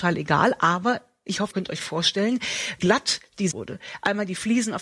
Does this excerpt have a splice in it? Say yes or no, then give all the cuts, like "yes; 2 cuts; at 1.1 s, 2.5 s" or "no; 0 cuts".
yes; 3 cuts; at 1.5 s, 2.8 s, 3.5 s